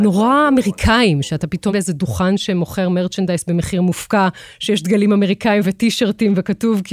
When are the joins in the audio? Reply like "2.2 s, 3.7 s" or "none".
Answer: 1.7 s